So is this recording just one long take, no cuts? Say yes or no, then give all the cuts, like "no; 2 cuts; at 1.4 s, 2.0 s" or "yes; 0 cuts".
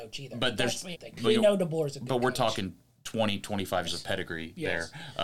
no; 3 cuts; at 0.9 s, 1.2 s, 3.8 s